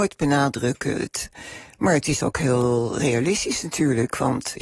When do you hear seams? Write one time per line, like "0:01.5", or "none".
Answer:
none